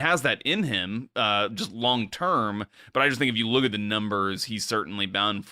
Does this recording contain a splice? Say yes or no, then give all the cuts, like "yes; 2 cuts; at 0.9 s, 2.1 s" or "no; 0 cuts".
no; 0 cuts